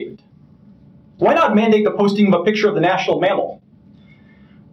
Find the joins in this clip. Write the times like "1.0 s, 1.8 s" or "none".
none